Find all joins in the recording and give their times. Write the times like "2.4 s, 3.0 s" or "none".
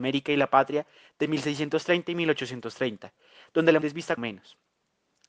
3.8 s, 4.2 s